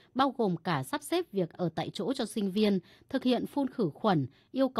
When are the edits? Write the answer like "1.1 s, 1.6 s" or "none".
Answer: 1.5 s